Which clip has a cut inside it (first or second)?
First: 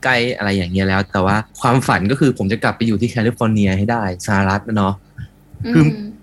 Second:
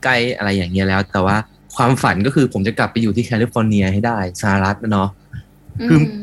first